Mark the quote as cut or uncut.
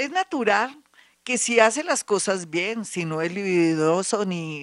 uncut